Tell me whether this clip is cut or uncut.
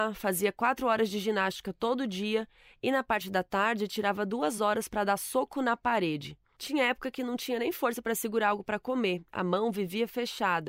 uncut